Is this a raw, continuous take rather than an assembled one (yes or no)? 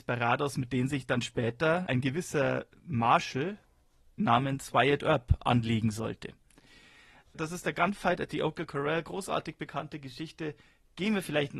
yes